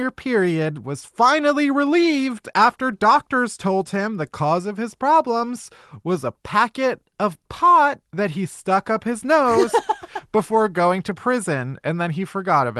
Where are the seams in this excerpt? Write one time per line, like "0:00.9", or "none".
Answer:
0:08.1